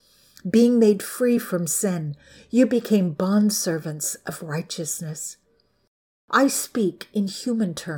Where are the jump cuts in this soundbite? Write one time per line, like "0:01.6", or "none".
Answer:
none